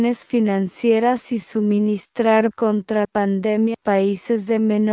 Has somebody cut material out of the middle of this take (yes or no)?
yes